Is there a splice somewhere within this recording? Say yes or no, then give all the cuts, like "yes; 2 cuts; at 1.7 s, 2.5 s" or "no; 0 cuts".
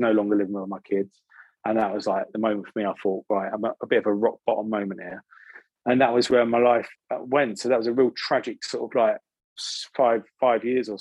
no; 0 cuts